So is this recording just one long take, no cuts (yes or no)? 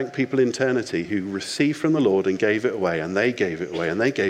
yes